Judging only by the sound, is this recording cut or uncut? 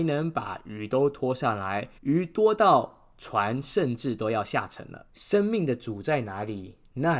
cut